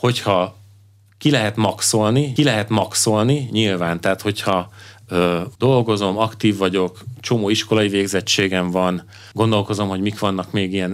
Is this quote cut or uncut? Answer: cut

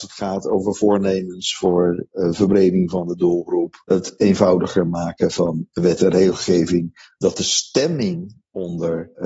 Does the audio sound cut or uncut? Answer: uncut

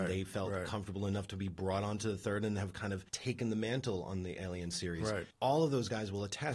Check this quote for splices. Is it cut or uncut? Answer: cut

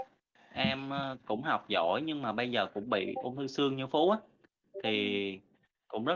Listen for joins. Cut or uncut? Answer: uncut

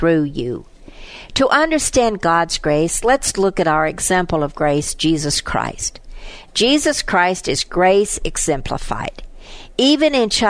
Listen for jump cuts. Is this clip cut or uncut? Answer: uncut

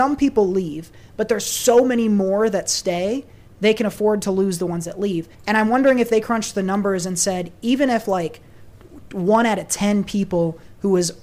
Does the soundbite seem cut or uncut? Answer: cut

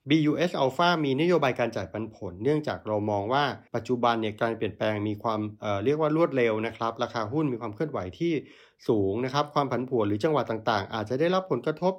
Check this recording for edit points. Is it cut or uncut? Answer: uncut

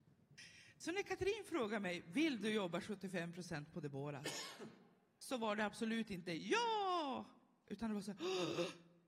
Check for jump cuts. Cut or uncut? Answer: uncut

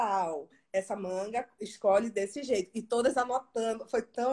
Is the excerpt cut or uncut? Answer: uncut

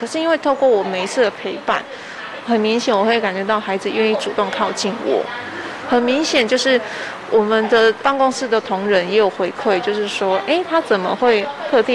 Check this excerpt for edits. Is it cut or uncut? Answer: uncut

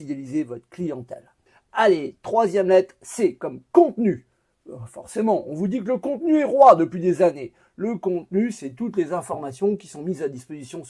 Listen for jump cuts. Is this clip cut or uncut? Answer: cut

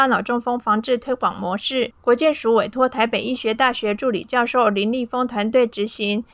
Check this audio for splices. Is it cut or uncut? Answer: uncut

